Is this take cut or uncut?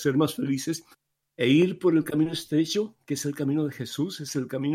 cut